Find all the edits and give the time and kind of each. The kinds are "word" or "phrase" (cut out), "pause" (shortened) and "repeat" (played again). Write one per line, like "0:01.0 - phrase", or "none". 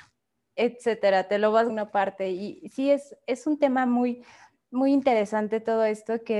0:01.7 - word